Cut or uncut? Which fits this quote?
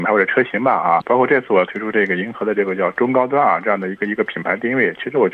cut